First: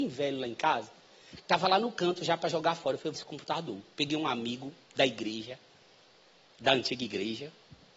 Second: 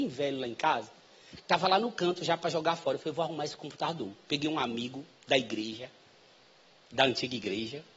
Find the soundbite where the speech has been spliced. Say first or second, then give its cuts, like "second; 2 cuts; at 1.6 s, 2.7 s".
first; 1 cut; at 3.2 s